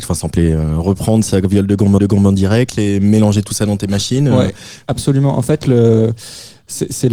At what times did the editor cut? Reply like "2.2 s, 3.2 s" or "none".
2.0 s